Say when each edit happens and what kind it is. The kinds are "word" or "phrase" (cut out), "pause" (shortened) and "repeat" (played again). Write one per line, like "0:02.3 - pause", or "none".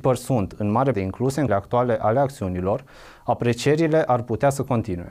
0:00.9 - word
0:01.5 - word